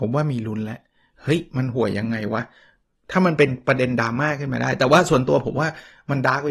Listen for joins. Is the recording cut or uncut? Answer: uncut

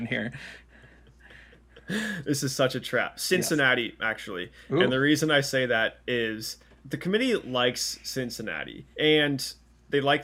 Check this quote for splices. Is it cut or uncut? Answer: cut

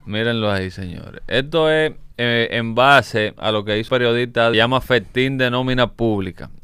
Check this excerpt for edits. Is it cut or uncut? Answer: cut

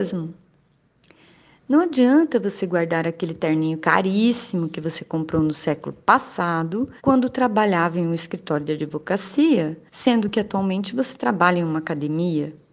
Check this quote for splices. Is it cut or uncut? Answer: cut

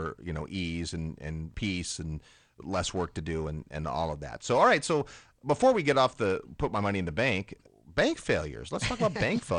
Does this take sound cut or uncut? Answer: uncut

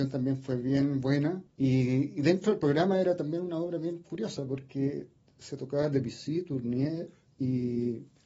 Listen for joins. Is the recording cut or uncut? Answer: uncut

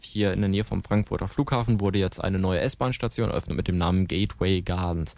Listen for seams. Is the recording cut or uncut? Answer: uncut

